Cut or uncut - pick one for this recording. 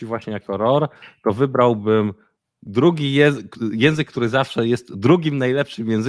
uncut